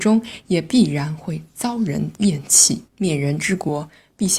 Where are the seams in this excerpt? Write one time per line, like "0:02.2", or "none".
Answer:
0:02.9